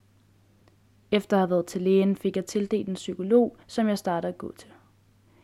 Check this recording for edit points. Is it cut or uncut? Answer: cut